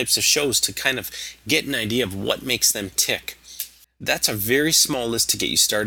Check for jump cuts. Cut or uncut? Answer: uncut